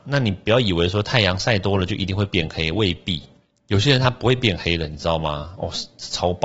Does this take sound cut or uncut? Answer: uncut